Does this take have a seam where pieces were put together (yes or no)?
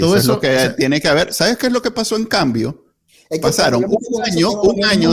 no